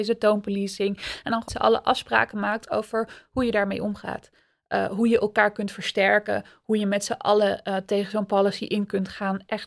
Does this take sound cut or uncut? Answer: cut